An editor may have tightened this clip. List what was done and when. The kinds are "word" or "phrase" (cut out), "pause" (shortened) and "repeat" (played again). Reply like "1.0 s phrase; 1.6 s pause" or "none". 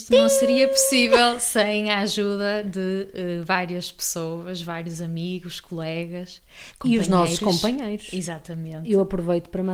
none